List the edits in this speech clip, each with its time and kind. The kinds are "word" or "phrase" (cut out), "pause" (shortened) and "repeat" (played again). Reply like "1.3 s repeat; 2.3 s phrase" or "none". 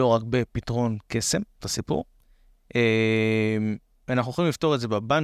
1.6 s word